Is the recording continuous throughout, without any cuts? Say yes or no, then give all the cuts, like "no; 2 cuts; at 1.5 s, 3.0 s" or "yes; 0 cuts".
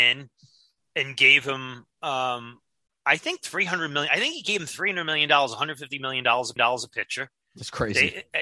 no; 2 cuts; at 1.9 s, 6.6 s